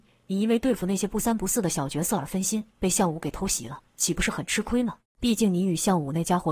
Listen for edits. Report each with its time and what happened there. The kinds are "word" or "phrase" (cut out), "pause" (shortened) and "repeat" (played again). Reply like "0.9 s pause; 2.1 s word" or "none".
2.7 s pause; 3.9 s pause; 5.0 s pause